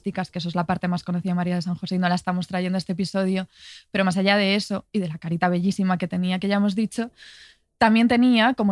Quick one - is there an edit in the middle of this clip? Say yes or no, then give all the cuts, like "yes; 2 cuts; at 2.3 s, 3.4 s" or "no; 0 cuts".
no; 0 cuts